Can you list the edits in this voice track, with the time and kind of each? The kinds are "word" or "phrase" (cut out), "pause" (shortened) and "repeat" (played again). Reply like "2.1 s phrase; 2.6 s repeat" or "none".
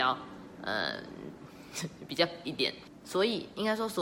2.4 s word